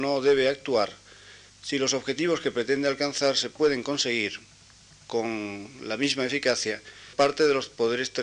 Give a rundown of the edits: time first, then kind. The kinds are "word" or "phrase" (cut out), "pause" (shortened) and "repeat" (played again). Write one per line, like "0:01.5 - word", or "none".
0:07.1 - word